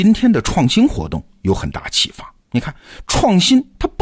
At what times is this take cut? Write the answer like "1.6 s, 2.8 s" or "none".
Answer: 2.4 s

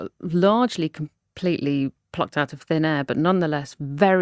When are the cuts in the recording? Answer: none

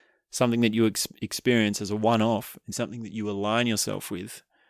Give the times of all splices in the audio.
2.7 s

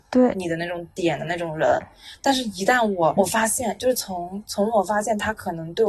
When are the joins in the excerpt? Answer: 3.2 s

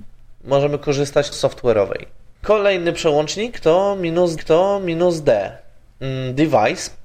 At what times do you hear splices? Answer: 1.3 s, 2.4 s, 4.4 s

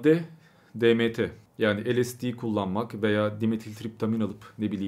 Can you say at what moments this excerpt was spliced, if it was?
1.5 s

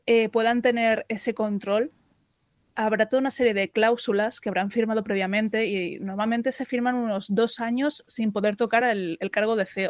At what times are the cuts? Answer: none

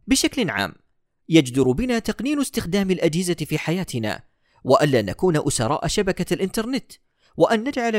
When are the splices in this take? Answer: none

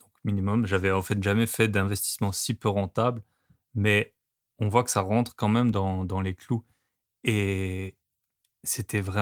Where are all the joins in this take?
none

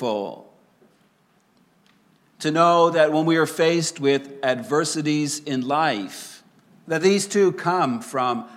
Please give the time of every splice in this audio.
6.7 s

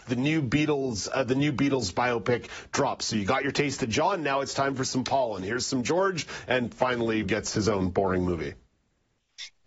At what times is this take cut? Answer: 7.2 s

